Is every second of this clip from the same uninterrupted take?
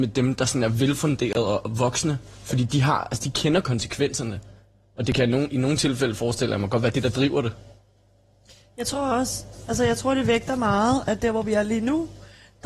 yes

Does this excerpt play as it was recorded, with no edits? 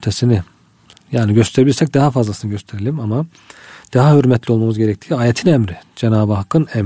yes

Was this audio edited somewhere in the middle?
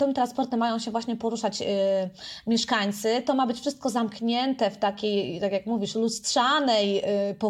no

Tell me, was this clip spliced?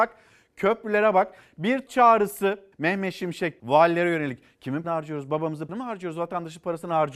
yes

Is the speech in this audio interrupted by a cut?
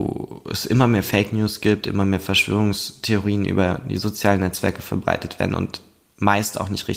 no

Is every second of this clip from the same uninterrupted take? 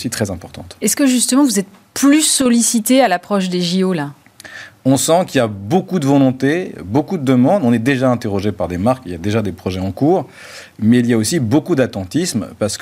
yes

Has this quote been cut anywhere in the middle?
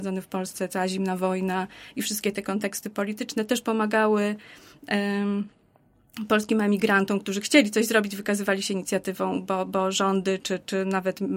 no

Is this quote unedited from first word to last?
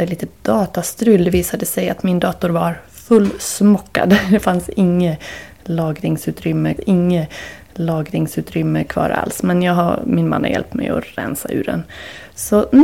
no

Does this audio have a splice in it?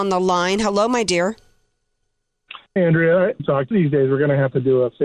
yes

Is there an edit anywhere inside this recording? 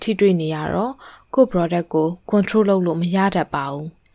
no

